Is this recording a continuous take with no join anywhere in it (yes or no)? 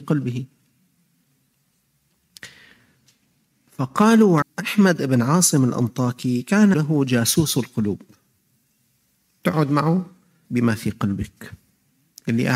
no